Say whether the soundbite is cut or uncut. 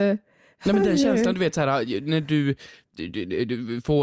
uncut